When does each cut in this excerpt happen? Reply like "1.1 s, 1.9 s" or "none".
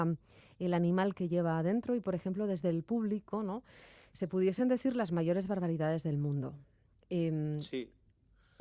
none